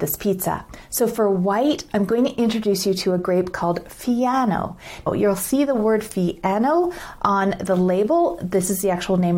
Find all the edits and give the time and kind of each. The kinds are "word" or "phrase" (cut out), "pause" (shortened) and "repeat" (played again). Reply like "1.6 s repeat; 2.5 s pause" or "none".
none